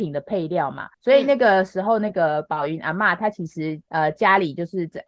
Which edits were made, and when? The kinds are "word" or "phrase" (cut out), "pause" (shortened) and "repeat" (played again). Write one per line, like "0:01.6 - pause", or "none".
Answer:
0:00.9 - pause
0:03.8 - pause